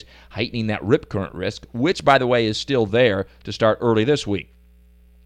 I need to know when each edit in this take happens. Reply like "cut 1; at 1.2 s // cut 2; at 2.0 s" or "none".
none